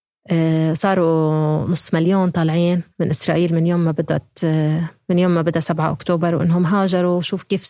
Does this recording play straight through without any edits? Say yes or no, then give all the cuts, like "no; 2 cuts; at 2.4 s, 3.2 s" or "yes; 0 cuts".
no; 1 cut; at 2.9 s